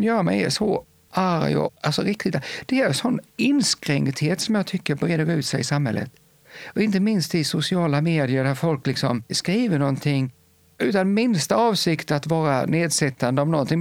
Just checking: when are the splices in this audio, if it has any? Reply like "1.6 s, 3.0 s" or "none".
none